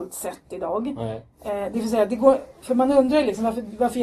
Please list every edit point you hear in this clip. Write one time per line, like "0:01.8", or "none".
0:01.3

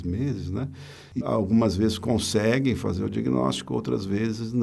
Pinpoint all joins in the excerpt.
0:01.2

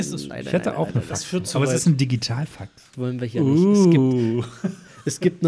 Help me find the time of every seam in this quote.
0:02.9

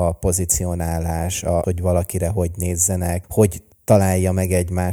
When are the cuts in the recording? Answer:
0:01.6
0:03.2
0:03.7

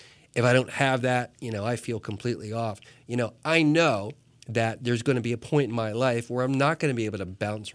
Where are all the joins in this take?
none

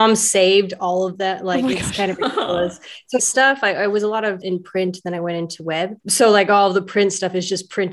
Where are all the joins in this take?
0:03.2
0:04.4
0:06.0

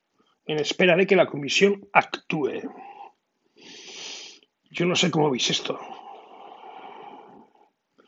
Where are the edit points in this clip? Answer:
none

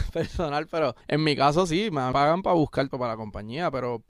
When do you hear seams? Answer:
0:01.0
0:02.1
0:02.9

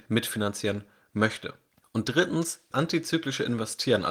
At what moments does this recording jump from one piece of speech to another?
0:02.7

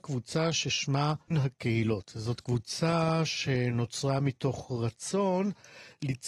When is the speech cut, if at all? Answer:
0:01.3

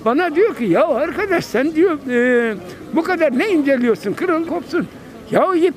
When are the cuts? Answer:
0:04.5

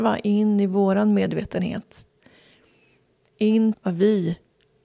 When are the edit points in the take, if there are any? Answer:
0:03.7

